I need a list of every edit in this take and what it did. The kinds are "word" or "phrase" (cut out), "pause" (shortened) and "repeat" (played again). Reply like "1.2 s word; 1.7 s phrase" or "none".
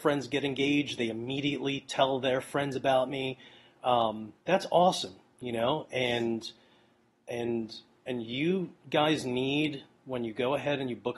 4.4 s pause